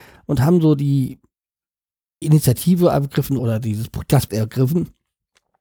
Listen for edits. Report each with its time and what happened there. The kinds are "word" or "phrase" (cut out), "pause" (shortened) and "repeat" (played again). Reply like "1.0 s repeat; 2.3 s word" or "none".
2.2 s word; 3.4 s word; 4.3 s word